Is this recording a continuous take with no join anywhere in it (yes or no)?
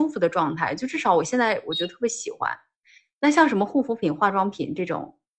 yes